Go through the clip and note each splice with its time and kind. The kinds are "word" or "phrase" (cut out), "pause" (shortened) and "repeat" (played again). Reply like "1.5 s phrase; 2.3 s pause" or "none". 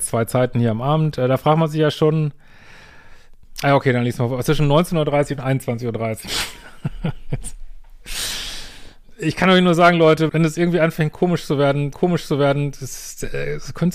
10.3 s word; 11.9 s repeat